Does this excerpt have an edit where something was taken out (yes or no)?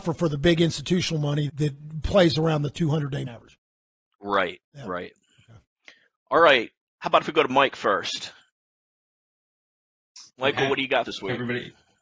yes